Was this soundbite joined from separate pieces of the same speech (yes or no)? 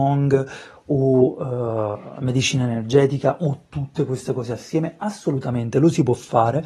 no